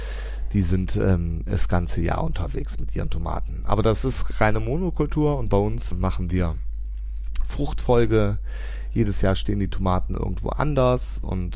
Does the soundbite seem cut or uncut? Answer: cut